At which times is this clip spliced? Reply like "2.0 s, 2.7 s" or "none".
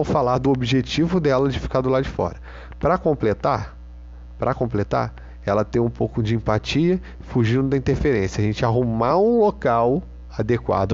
none